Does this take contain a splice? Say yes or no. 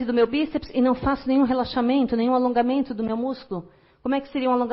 no